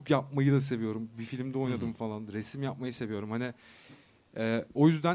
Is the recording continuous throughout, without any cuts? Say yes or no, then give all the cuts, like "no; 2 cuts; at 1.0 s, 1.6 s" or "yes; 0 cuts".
yes; 0 cuts